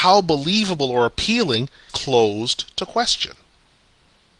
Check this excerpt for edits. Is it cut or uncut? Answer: cut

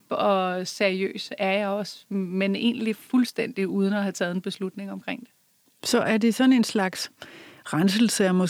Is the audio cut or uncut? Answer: uncut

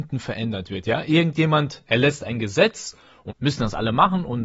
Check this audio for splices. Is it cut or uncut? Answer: cut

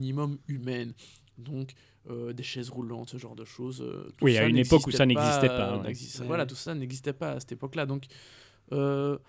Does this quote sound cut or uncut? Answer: uncut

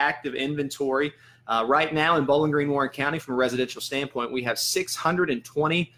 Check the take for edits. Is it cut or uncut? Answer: uncut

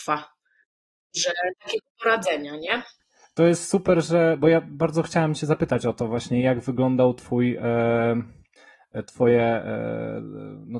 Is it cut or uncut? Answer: uncut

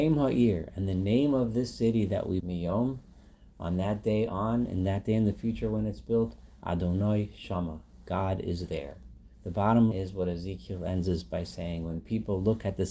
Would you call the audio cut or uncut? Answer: cut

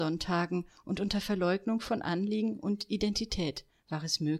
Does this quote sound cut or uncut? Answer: uncut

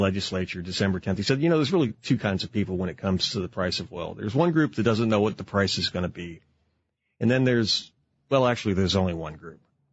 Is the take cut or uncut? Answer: uncut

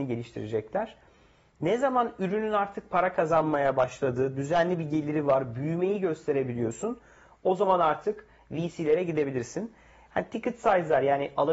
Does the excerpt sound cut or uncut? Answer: uncut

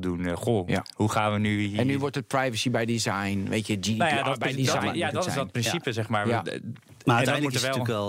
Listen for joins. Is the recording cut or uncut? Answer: uncut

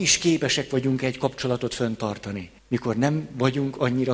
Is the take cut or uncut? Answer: cut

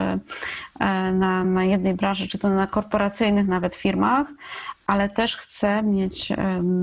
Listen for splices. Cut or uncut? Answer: cut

